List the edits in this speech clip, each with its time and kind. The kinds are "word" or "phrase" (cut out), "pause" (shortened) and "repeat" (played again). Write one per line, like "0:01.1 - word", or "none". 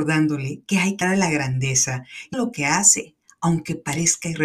0:01.0 - word
0:02.3 - word